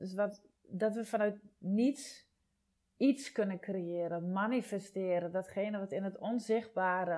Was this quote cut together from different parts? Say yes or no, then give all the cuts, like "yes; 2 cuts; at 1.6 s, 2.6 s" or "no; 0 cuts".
no; 0 cuts